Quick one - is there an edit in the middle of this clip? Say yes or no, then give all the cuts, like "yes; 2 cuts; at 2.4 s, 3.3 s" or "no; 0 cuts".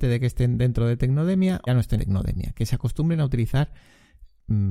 yes; 2 cuts; at 1.7 s, 2.0 s